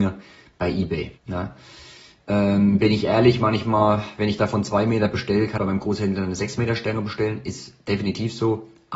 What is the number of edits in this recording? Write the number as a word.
two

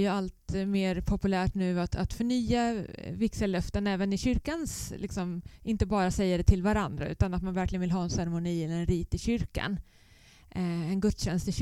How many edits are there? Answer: zero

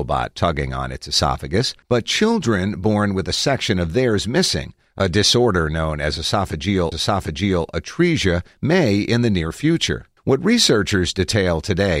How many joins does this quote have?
three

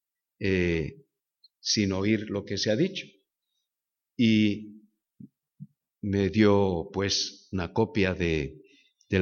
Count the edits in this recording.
zero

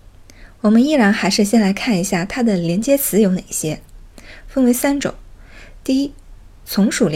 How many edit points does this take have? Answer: zero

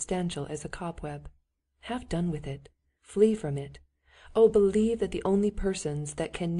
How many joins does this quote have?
zero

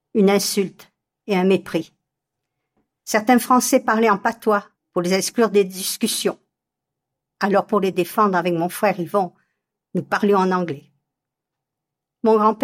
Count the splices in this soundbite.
zero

